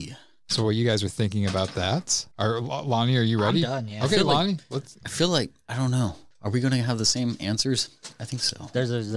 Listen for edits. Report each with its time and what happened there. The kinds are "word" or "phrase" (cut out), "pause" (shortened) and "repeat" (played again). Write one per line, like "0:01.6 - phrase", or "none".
0:02.3 - pause